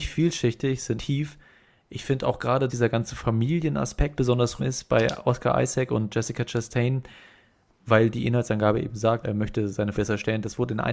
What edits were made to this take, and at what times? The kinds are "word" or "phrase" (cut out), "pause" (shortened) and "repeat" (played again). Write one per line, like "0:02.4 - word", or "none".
0:01.0 - word
0:02.7 - word
0:04.2 - word
0:04.6 - word
0:09.2 - word
0:09.9 - word